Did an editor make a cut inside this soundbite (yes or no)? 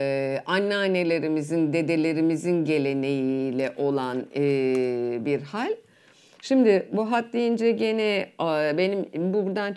no